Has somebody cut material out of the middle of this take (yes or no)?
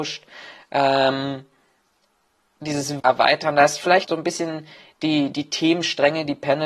yes